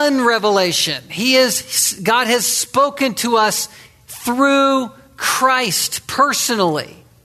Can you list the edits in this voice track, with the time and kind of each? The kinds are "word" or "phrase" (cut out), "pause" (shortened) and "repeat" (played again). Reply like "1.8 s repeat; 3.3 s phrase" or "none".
none